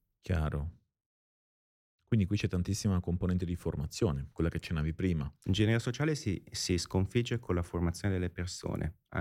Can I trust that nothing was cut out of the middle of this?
yes; 0 cuts

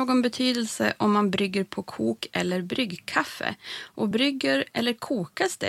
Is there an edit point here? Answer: no; 0 cuts

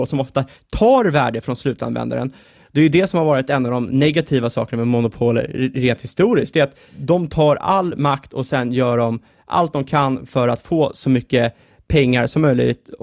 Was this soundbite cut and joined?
no; 0 cuts

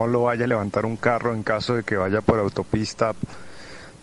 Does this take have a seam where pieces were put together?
no; 0 cuts

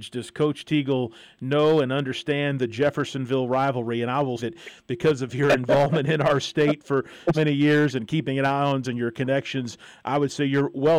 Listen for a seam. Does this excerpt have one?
yes; 3 cuts; at 4.4 s, 7.3 s, 8.8 s

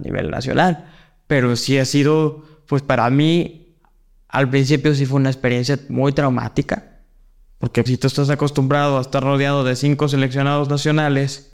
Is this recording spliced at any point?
yes; 1 cut; at 7.9 s

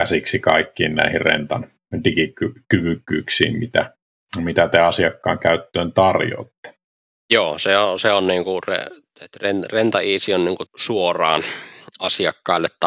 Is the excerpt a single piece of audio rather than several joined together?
yes; 0 cuts

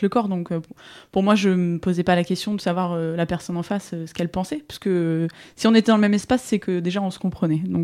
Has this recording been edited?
no; 0 cuts

